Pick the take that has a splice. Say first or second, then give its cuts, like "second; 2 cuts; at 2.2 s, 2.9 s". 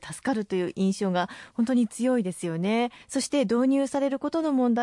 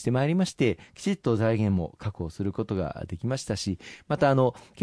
first; 1 cut; at 3.0 s